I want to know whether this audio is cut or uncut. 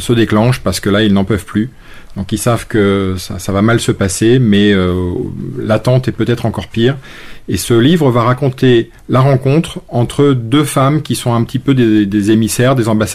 cut